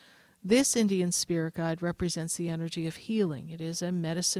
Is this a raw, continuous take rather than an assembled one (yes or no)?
yes